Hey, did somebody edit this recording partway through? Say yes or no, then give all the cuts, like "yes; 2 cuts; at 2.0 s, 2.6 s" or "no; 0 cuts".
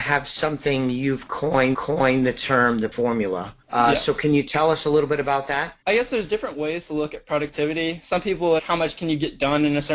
yes; 5 cuts; at 1.7 s, 2.9 s, 3.6 s, 5.8 s, 8.6 s